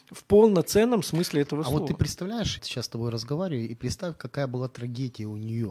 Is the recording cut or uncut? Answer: cut